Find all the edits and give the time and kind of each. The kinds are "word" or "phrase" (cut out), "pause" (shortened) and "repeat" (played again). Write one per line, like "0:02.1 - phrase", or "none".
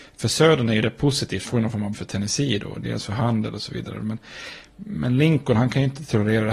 0:01.5 - word
0:01.9 - phrase